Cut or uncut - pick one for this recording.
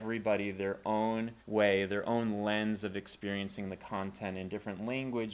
cut